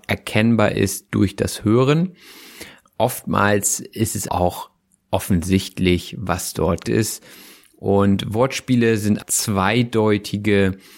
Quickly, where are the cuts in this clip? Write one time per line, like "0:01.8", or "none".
0:04.3
0:06.9
0:09.2